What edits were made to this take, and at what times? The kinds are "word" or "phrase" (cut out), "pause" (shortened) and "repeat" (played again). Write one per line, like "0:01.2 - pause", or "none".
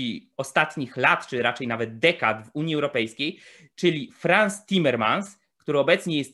none